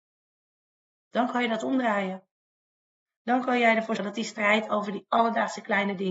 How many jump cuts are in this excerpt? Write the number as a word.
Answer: one